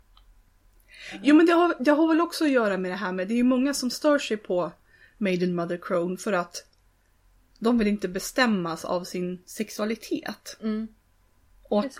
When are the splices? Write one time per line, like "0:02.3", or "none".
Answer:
none